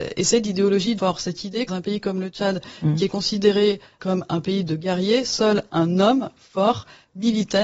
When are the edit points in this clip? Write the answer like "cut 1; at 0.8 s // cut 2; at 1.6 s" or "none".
cut 1; at 1.0 s // cut 2; at 1.7 s // cut 3; at 4.0 s